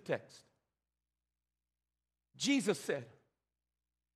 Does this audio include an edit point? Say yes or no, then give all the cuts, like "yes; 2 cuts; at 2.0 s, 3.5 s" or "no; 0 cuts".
no; 0 cuts